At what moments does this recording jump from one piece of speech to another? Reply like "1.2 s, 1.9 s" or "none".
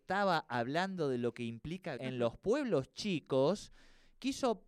2.0 s